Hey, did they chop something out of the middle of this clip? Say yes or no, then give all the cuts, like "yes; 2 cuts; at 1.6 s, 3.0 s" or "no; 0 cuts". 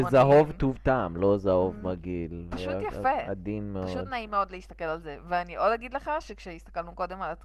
no; 0 cuts